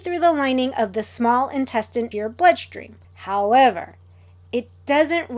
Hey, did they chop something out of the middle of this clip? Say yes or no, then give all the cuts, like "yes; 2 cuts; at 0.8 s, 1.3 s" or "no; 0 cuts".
yes; 2 cuts; at 2.1 s, 3.0 s